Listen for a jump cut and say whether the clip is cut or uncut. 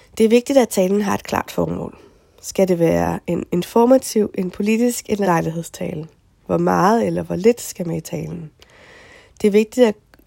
cut